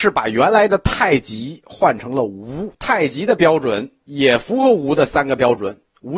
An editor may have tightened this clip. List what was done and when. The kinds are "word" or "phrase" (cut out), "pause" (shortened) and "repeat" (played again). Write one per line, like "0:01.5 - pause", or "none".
0:02.7 - pause